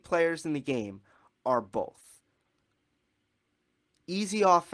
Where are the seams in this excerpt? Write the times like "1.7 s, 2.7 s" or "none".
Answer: none